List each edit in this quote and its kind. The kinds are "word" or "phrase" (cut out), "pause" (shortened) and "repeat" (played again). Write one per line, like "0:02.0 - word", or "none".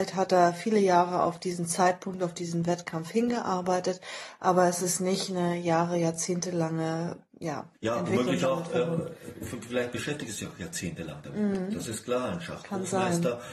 0:07.7 - pause